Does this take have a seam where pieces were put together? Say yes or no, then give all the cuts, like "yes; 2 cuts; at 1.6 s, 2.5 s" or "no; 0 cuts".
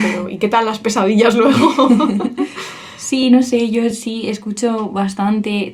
no; 0 cuts